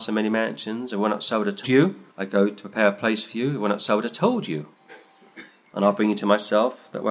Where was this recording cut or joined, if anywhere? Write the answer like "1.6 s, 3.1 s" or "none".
1.6 s, 2.1 s